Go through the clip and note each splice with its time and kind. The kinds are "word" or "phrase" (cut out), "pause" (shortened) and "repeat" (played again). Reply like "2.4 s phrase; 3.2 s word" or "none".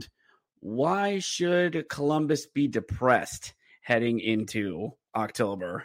none